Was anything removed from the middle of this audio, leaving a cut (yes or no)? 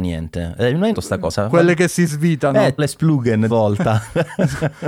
yes